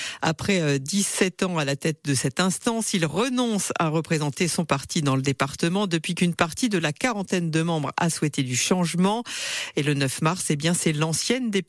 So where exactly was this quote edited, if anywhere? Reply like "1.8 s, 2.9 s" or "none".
none